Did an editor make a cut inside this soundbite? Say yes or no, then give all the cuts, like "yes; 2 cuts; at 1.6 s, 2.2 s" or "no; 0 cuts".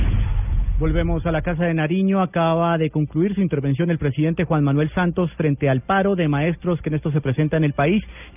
yes; 1 cut; at 7.0 s